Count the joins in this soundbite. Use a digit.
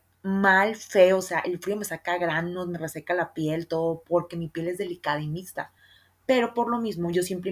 0